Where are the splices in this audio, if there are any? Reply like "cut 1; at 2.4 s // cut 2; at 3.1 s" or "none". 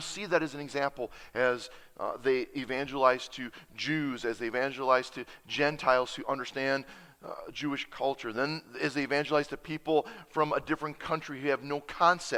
none